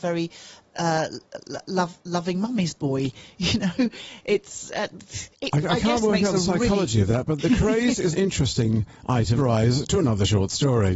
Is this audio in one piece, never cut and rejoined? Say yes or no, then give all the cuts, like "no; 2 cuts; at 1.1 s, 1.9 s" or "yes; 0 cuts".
no; 4 cuts; at 5.3 s, 7.4 s, 8.1 s, 9.4 s